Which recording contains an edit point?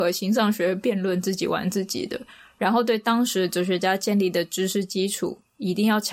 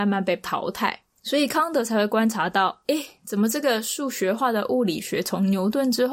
second; 1 cut; at 1.1 s

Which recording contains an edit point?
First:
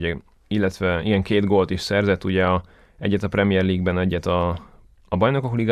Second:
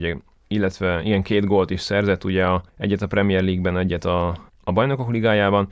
second; 2 cuts; at 2.7 s, 4.5 s

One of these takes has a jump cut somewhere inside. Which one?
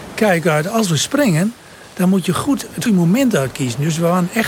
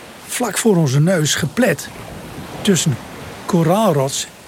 first; 1 cut; at 2.9 s

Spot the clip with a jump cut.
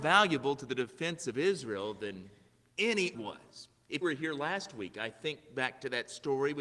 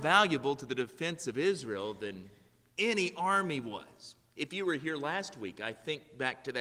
first; 2 cuts; at 3.1 s, 4.0 s

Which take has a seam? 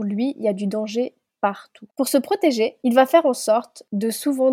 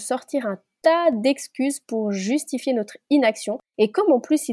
first; 1 cut; at 1.9 s

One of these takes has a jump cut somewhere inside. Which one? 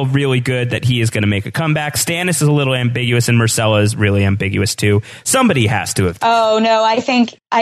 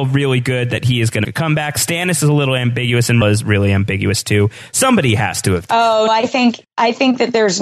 second; 3 cuts; at 1.2 s, 3.2 s, 6.1 s

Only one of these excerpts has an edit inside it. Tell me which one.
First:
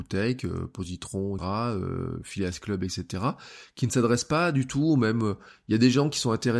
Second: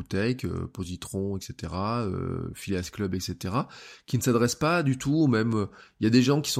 first; 1 cut; at 1.4 s

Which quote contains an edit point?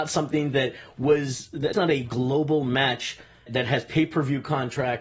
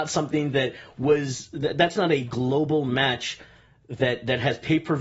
first; 2 cuts; at 1.7 s, 3.5 s

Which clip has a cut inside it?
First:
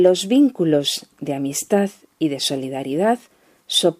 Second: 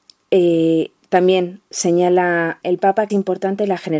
second; 2 cuts; at 2.6 s, 3.1 s

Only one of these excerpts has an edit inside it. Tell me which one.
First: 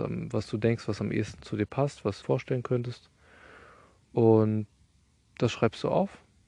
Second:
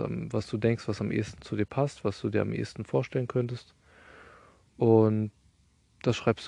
first; 1 cut; at 2.2 s

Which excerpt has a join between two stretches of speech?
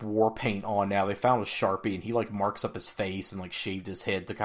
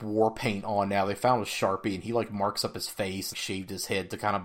second; 1 cut; at 3.3 s

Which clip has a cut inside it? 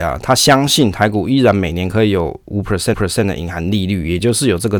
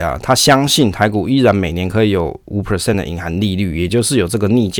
first; 1 cut; at 2.9 s

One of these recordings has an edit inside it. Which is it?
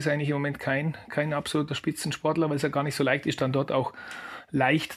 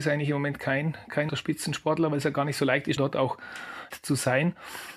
second; 3 cuts; at 1.3 s, 3.0 s, 3.9 s

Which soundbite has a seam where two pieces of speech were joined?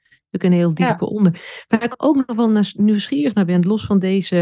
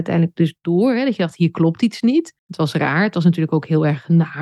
second; 1 cut; at 2.4 s

